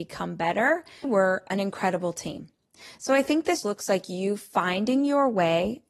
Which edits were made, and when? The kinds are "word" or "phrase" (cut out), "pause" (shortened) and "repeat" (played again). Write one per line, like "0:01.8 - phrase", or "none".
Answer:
0:01.0 - word
0:03.6 - word